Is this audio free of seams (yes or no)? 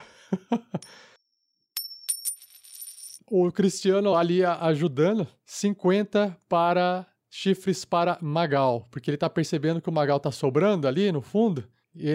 yes